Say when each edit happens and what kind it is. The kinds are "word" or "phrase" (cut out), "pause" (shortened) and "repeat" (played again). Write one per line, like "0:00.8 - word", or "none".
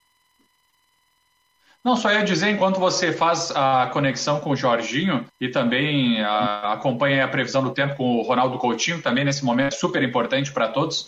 0:05.3 - pause
0:09.7 - word